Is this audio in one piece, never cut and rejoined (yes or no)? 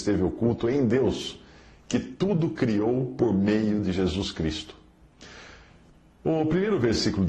yes